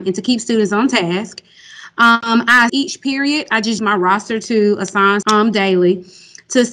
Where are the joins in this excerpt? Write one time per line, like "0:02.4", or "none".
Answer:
0:02.7
0:03.8
0:05.2

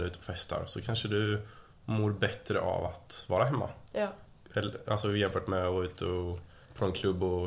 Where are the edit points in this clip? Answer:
none

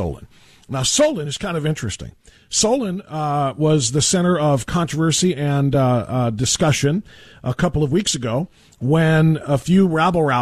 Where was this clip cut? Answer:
none

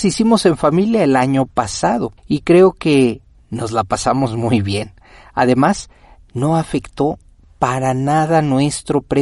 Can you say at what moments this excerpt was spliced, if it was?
none

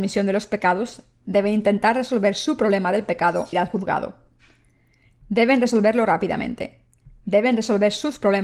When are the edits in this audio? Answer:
0:03.5

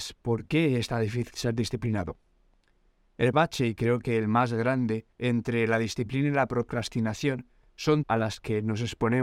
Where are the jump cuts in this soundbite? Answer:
0:03.3
0:05.1
0:08.0

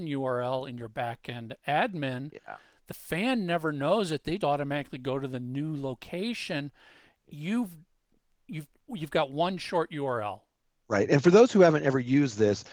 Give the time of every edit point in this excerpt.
0:04.4
0:08.7

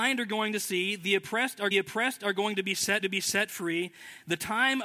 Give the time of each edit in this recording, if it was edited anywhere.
0:01.7
0:03.0

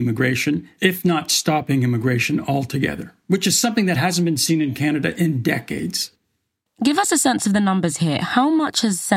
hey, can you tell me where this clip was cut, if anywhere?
none

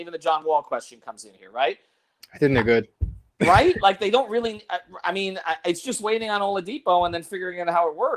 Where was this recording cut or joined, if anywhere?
none

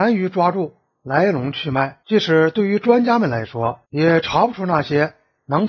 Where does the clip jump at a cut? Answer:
0:02.0
0:03.8

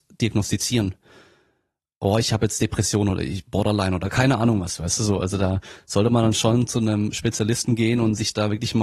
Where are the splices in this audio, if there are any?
none

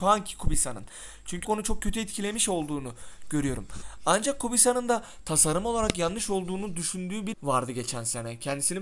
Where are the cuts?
0:01.4
0:07.3

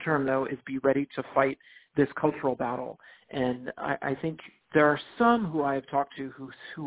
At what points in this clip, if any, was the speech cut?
none

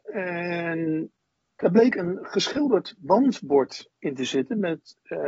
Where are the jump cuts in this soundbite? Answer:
none

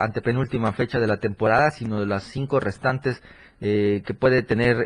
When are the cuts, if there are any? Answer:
none

